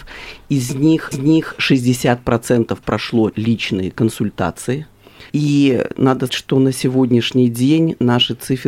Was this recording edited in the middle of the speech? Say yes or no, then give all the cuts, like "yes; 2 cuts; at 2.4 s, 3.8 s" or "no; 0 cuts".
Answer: yes; 4 cuts; at 1.1 s, 3.3 s, 5.3 s, 6.3 s